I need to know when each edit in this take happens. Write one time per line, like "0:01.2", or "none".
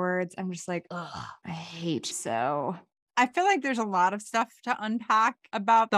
0:01.4
0:02.1